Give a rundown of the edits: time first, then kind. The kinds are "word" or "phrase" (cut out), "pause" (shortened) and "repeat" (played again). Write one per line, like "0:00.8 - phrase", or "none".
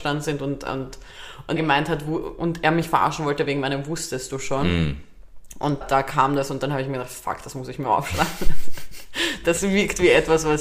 0:01.6 - word
0:05.8 - word